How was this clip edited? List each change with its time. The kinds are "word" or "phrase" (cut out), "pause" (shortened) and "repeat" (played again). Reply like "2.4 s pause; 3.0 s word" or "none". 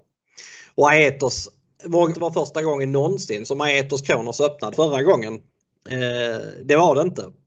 2.1 s phrase; 4.7 s word